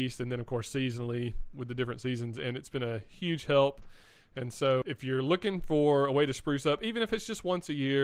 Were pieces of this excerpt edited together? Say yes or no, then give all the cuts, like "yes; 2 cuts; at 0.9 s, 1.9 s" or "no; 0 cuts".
yes; 2 cuts; at 1.5 s, 4.8 s